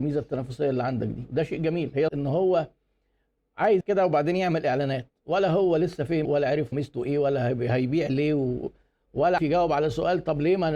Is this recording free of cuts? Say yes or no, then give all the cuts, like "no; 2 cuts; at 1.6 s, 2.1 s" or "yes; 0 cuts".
no; 5 cuts; at 2.1 s, 3.8 s, 6.2 s, 6.7 s, 9.4 s